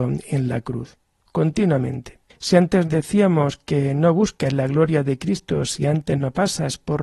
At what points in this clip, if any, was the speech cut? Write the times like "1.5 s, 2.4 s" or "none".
none